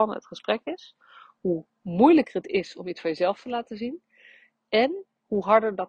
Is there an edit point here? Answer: no; 0 cuts

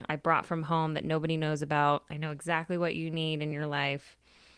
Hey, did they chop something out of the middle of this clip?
no; 0 cuts

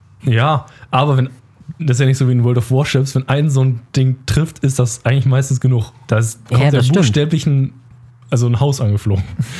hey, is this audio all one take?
yes; 0 cuts

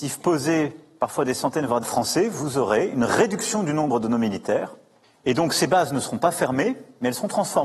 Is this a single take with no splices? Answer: no; 1 cut; at 1.8 s

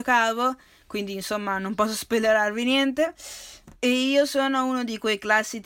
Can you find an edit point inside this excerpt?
yes; 1 cut; at 3.7 s

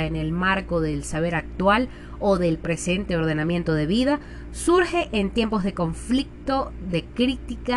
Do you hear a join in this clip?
no; 0 cuts

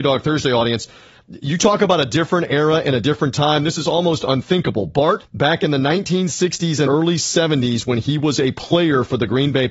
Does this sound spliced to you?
yes; 2 cuts; at 5.2 s, 6.9 s

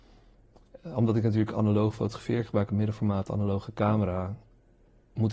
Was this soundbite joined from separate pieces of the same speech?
no; 0 cuts

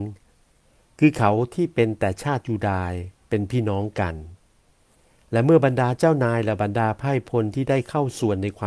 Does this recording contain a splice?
no; 0 cuts

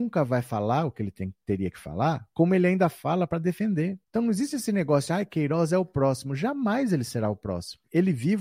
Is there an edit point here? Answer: yes; 1 cut; at 4.0 s

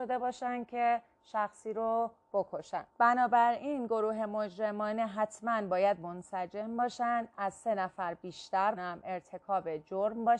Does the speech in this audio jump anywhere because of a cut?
yes; 2 cuts; at 2.9 s, 8.8 s

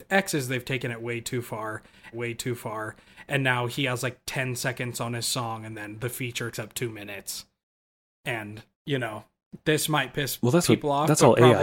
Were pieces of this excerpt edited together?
yes; 3 cuts; at 2.1 s, 6.5 s, 8.7 s

